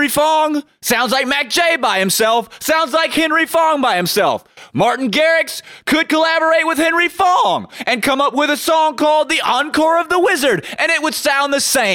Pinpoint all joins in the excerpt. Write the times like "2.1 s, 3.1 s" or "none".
none